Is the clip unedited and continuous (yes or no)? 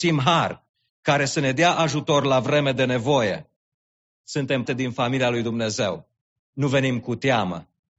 no